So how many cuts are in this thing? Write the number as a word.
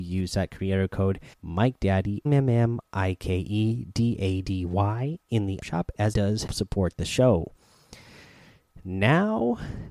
six